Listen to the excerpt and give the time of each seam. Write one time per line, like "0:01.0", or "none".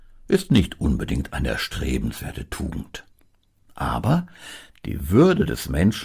none